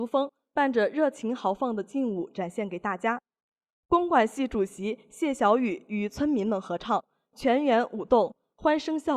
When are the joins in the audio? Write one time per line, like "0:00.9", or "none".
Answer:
none